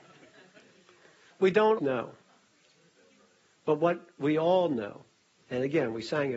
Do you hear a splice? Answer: yes; 1 cut; at 1.8 s

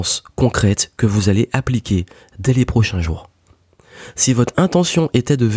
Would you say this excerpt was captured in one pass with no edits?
yes; 0 cuts

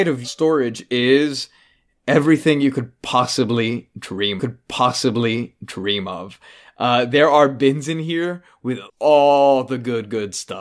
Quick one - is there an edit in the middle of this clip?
yes; 2 cuts; at 4.4 s, 8.9 s

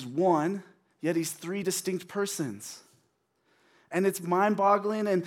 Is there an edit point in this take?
no; 0 cuts

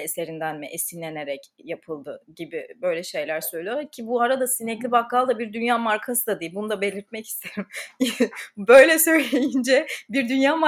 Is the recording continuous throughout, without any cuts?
yes; 0 cuts

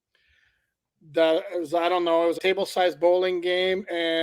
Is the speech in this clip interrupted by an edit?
yes; 1 cut; at 2.4 s

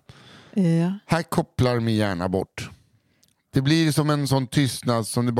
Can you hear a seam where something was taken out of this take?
no; 0 cuts

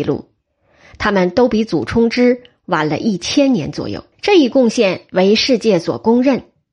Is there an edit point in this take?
yes; 1 cut; at 4.1 s

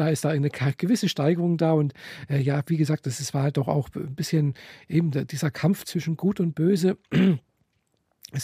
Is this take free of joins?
yes; 0 cuts

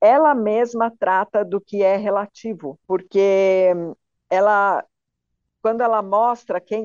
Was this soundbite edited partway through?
yes; 1 cut; at 2.8 s

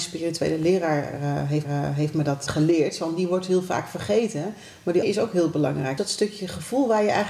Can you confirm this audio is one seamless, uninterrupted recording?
no; 4 cuts; at 1.6 s, 2.5 s, 5.0 s, 6.0 s

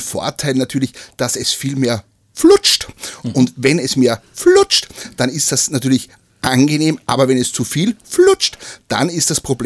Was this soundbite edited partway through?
no; 0 cuts

